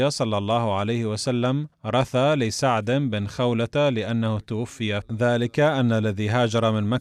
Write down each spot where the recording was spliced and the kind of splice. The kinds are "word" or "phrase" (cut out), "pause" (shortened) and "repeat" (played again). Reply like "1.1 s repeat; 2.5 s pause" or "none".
1.7 s pause; 5.0 s phrase